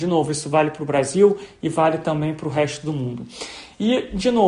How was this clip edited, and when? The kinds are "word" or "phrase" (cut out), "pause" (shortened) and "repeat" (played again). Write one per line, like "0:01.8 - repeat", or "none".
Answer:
none